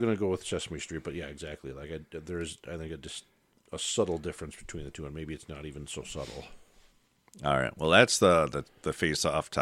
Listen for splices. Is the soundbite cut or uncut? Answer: uncut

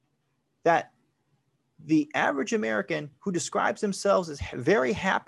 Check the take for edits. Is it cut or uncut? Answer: uncut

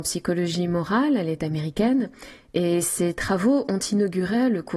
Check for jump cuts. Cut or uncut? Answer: uncut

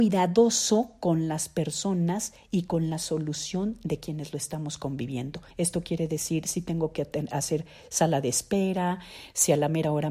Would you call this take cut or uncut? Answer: cut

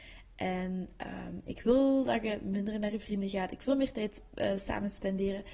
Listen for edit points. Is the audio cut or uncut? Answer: uncut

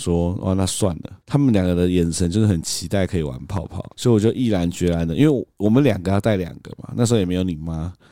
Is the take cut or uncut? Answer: cut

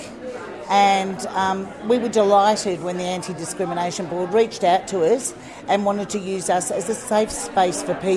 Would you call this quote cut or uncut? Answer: uncut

